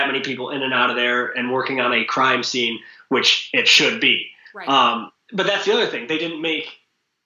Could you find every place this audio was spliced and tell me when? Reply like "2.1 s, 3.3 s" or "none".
none